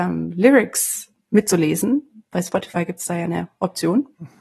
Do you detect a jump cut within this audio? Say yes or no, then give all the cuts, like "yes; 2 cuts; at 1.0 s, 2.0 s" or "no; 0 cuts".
yes; 1 cut; at 1.2 s